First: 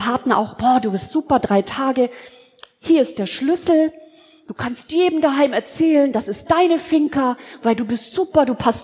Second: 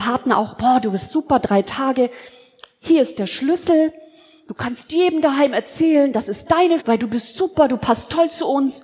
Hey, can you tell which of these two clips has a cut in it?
second; 1 cut; at 6.8 s

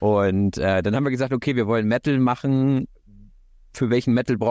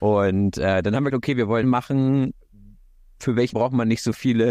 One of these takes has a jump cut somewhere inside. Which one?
second; 3 cuts; at 1.1 s, 1.6 s, 3.5 s

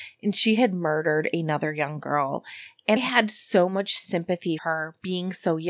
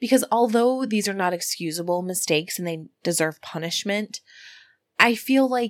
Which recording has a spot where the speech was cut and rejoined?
first; 2 cuts; at 3.0 s, 4.6 s

